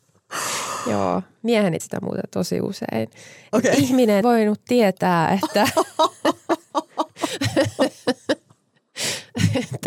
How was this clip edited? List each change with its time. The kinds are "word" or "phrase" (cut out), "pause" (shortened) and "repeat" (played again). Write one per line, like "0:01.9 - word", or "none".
0:01.8 - word
0:04.2 - word